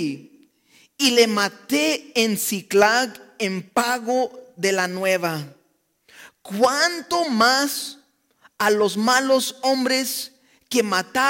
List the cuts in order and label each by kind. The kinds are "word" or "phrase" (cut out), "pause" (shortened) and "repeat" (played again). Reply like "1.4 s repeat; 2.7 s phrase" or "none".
none